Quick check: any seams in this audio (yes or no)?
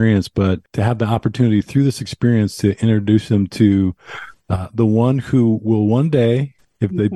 no